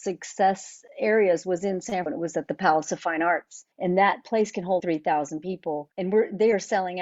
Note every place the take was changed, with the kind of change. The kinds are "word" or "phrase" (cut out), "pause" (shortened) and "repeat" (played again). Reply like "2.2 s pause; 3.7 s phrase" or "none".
2.1 s word; 3.7 s pause; 4.8 s word; 5.9 s pause